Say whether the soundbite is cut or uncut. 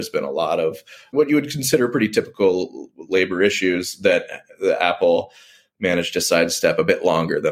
uncut